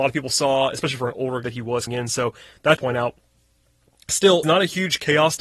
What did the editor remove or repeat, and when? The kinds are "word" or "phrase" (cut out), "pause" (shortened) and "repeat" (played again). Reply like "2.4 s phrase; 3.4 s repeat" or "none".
1.4 s word; 1.9 s word; 2.8 s word; 4.4 s word